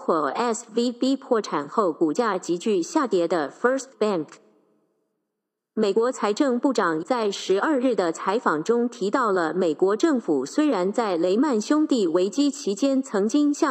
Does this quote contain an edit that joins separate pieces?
yes; 2 cuts; at 3.9 s, 7.0 s

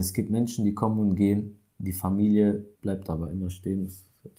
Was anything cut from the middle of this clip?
yes; 1 cut; at 2.7 s

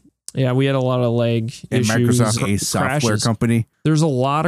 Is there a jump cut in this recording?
yes; 1 cut; at 2.4 s

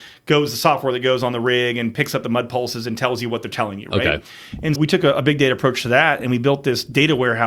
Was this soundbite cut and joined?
yes; 1 cut; at 4.8 s

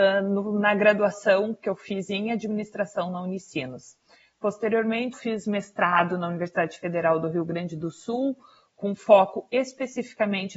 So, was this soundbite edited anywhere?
yes; 1 cut; at 5.1 s

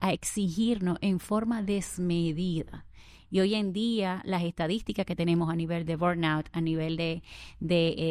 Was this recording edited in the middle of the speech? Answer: no; 0 cuts

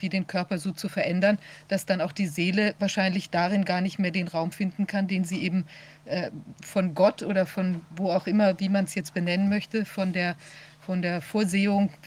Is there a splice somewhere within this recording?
no; 0 cuts

